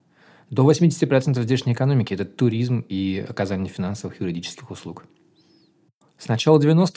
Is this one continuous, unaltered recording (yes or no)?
yes